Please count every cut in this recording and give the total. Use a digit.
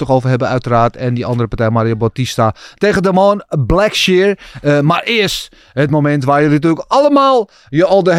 0